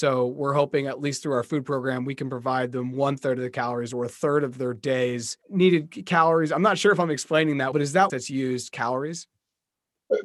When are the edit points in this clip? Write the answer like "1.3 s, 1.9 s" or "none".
5.4 s, 7.7 s, 8.1 s